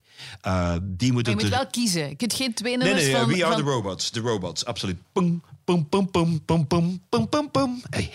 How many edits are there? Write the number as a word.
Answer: zero